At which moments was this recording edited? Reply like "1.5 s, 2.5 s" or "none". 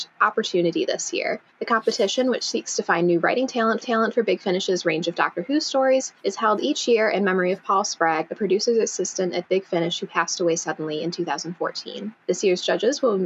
1.5 s, 3.8 s, 6.2 s, 12.2 s